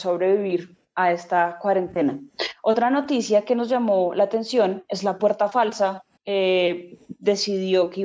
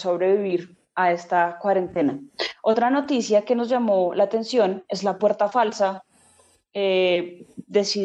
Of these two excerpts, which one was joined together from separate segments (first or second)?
first